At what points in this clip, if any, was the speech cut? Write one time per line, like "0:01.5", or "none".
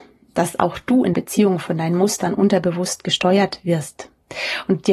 0:01.1